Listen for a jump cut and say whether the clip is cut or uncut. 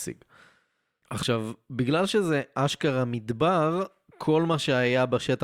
uncut